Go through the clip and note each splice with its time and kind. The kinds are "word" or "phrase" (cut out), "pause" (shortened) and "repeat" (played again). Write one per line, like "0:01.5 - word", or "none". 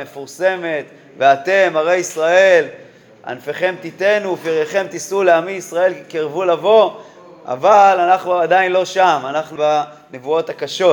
0:09.6 - word